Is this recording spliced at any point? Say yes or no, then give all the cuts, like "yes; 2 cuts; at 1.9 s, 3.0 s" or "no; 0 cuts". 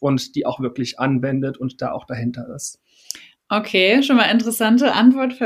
no; 0 cuts